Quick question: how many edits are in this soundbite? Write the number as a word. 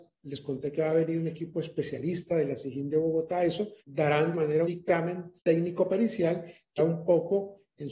five